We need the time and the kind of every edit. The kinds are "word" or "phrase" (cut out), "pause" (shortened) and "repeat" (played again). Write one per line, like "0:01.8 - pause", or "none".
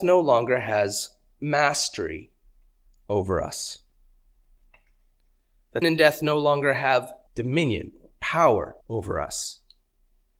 0:05.8 - word
0:07.3 - pause
0:08.8 - pause